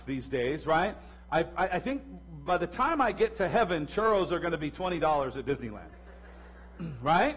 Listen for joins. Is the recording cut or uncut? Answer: uncut